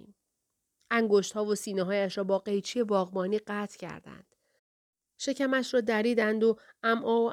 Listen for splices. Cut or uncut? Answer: uncut